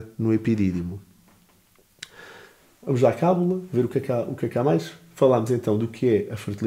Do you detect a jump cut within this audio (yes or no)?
no